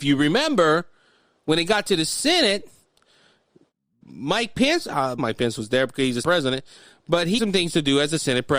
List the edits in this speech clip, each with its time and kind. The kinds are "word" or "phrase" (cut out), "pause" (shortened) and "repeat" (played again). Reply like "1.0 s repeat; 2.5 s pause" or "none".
4.0 s word; 5.2 s word; 6.2 s word; 7.4 s word